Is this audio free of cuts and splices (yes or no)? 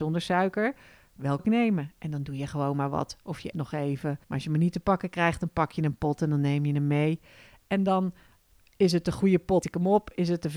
no